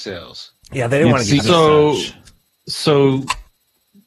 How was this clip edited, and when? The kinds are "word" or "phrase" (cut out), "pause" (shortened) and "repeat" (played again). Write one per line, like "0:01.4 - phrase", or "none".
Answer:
0:01.4 - word